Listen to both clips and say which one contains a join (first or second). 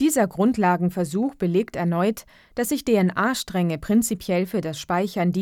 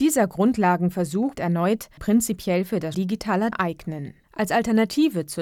second